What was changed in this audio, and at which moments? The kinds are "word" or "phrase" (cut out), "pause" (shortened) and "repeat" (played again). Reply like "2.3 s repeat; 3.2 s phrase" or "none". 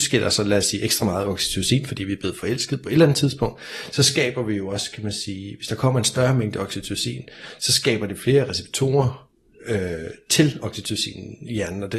none